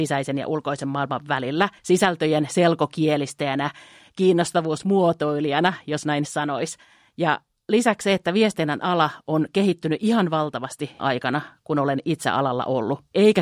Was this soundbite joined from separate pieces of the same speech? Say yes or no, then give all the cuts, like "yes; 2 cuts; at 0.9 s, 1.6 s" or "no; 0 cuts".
yes; 3 cuts; at 1.8 s, 6.2 s, 11.0 s